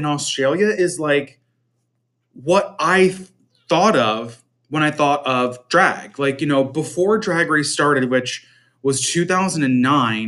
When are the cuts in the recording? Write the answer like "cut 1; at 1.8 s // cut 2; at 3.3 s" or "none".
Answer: none